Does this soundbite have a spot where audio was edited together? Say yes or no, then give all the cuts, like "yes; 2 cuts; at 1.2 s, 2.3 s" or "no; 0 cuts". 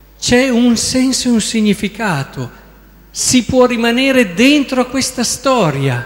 no; 0 cuts